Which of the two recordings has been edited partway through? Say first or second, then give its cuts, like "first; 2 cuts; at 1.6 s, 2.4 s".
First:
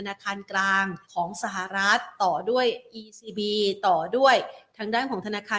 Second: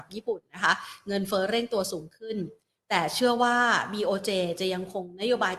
first; 1 cut; at 1.0 s